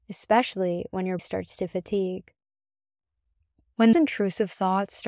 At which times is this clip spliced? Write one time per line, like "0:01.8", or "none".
0:01.2
0:03.9